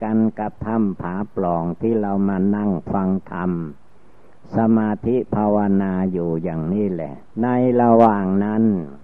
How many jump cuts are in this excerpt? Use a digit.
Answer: 1